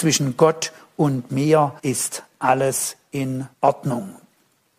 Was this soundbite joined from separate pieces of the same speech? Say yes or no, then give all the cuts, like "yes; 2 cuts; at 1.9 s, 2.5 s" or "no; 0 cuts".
yes; 2 cuts; at 1.8 s, 3.5 s